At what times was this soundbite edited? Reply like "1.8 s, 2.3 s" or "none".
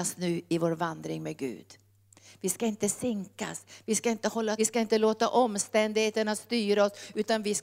4.6 s

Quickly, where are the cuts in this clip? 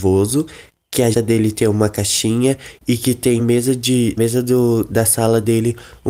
1.1 s, 3.4 s, 4.2 s

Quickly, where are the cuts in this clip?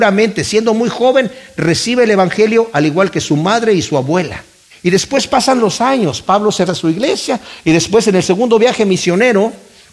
4.7 s, 6.7 s

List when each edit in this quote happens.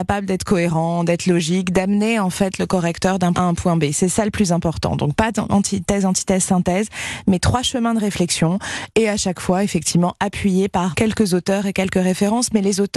3.3 s, 10.9 s

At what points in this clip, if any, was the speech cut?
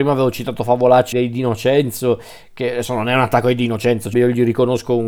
1.1 s, 4.1 s

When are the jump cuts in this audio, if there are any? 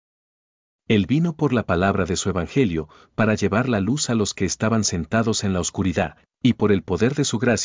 none

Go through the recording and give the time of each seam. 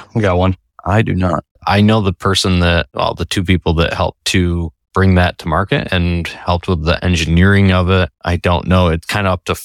none

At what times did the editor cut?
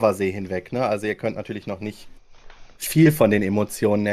none

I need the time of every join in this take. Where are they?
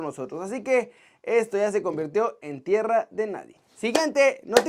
none

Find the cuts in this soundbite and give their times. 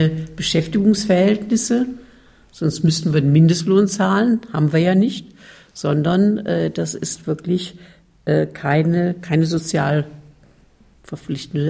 none

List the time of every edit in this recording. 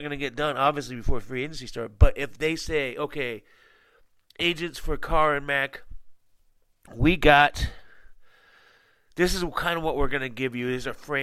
none

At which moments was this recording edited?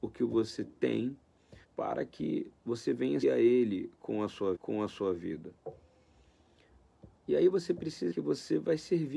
1.6 s, 2.6 s, 3.2 s, 4.5 s, 8.1 s

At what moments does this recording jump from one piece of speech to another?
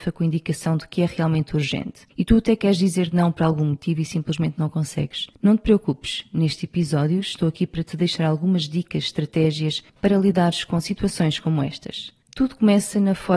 2.1 s, 5.3 s, 9.9 s, 12.2 s

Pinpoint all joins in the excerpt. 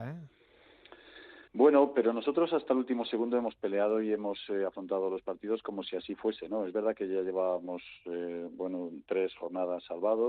1.5 s

